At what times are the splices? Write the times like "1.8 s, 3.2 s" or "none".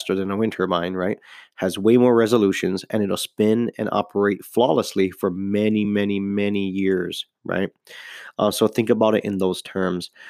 none